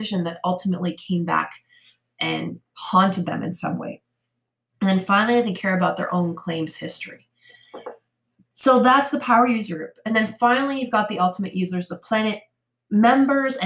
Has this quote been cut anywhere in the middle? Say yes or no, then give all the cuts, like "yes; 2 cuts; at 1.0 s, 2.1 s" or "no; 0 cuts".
no; 0 cuts